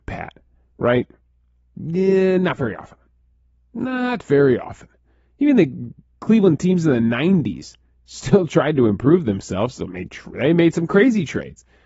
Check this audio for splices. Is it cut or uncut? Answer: uncut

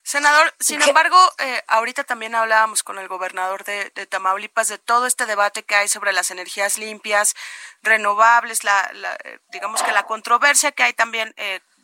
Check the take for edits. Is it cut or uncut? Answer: uncut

